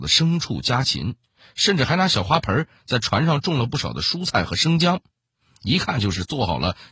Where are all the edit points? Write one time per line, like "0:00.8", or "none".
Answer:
none